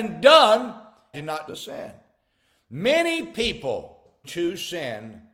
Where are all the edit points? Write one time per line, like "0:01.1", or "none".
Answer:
0:01.1
0:01.5
0:04.2

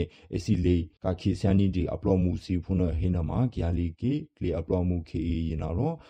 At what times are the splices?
0:01.0

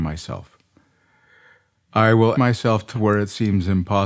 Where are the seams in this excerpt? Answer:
0:02.3
0:02.9

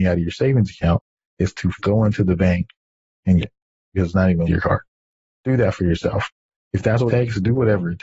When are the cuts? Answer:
0:01.8
0:03.4
0:04.4
0:07.1

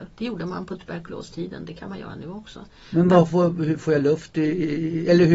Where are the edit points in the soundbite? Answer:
none

